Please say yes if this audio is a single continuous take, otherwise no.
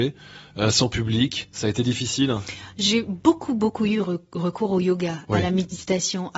yes